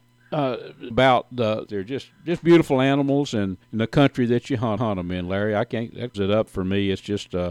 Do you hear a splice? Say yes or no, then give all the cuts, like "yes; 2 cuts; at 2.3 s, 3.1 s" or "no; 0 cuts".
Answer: yes; 5 cuts; at 0.9 s, 1.7 s, 3.6 s, 4.8 s, 6.1 s